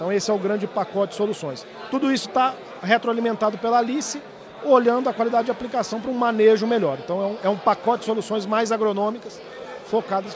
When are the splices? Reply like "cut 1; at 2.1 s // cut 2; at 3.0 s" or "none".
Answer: none